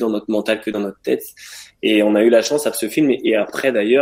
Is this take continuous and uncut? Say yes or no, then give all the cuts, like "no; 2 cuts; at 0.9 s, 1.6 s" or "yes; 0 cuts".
no; 1 cut; at 2.7 s